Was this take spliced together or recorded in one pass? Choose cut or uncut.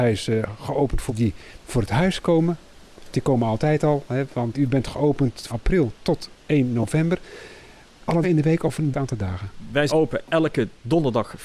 cut